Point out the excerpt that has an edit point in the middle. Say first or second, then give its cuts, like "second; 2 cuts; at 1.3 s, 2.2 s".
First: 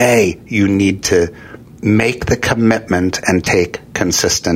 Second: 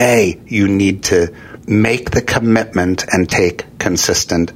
second; 1 cut; at 1.6 s